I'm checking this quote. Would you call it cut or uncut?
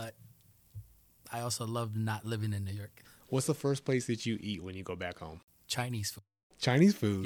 uncut